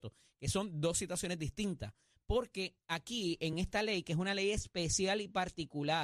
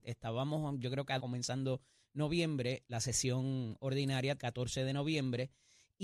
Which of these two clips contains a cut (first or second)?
second